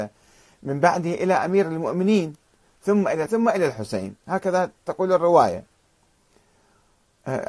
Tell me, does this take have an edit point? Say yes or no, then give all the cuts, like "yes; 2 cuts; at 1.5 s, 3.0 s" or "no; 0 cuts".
yes; 1 cut; at 3.3 s